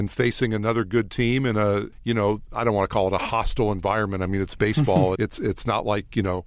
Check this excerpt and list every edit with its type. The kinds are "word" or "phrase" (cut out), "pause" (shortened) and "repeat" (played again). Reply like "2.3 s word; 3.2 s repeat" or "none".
5.2 s word

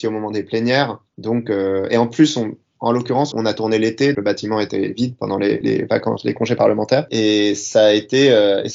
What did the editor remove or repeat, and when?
1.1 s pause; 3.3 s word; 4.1 s word; 5.6 s word

